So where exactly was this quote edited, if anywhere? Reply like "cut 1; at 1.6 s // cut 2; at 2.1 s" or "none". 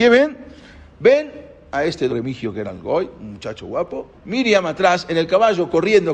cut 1; at 2.1 s // cut 2; at 4.1 s